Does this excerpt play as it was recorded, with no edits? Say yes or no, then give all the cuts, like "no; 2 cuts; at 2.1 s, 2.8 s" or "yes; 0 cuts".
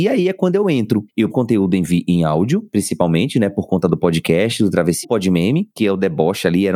no; 2 cuts; at 1.3 s, 5.0 s